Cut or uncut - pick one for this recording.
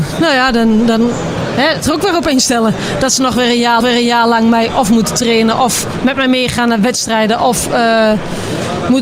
cut